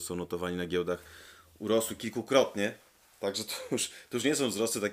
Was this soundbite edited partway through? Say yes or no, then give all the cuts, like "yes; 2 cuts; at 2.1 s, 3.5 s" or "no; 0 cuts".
no; 0 cuts